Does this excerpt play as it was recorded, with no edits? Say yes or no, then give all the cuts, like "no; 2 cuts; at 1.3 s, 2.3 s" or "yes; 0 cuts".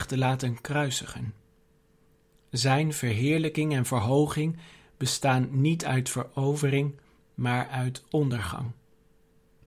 yes; 0 cuts